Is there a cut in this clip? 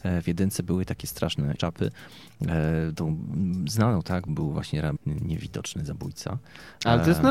yes; 3 cuts; at 1.6 s, 4.3 s, 5.0 s

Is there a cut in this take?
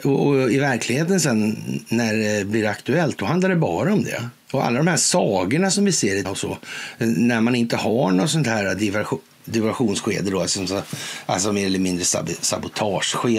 yes; 2 cuts; at 4.4 s, 6.2 s

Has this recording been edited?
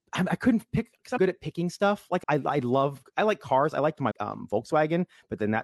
yes; 3 cuts; at 1.2 s, 2.2 s, 4.1 s

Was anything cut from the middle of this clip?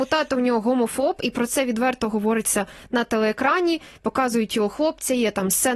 no; 0 cuts

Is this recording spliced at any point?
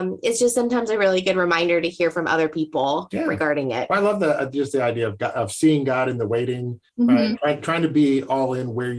yes; 1 cut; at 6.9 s

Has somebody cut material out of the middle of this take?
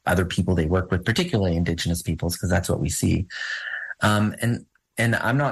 no; 0 cuts

